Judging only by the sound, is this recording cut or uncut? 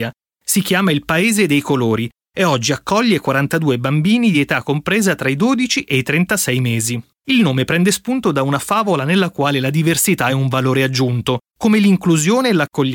uncut